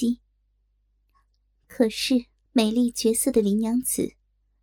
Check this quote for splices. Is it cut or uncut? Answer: cut